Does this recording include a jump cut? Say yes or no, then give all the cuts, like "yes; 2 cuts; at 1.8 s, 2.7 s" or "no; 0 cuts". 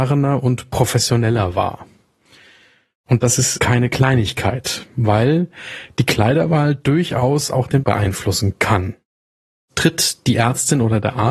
yes; 2 cuts; at 3.6 s, 7.8 s